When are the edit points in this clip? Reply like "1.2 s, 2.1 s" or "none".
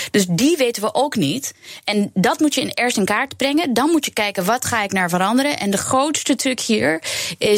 none